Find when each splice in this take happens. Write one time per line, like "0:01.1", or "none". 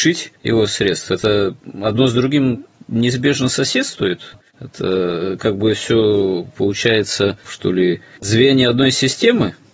0:04.5
0:07.4